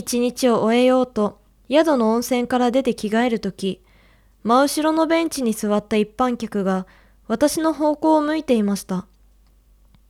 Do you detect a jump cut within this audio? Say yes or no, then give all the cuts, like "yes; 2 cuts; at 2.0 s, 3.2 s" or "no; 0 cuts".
no; 0 cuts